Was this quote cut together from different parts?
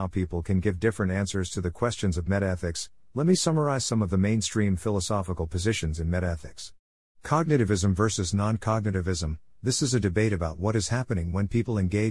no; 0 cuts

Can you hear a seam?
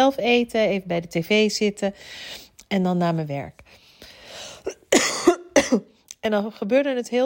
no; 0 cuts

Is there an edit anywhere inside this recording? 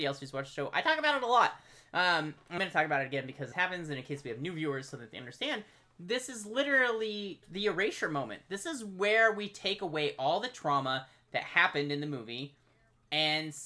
yes; 3 cuts; at 2.6 s, 3.5 s, 7.4 s

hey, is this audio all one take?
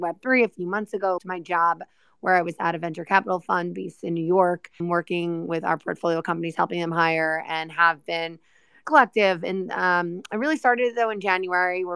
no; 3 cuts; at 1.2 s, 4.8 s, 8.8 s

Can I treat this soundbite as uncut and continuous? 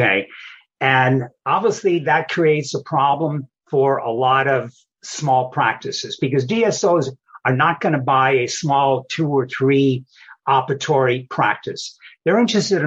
yes; 0 cuts

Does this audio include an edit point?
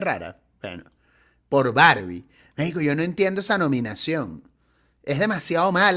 no; 0 cuts

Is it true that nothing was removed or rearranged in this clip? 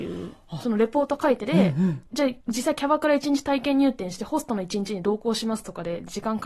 no; 2 cuts; at 2.1 s, 2.4 s

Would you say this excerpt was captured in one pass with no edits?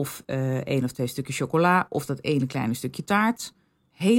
yes; 0 cuts

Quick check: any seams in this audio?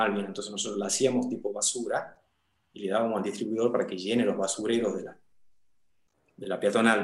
no; 0 cuts

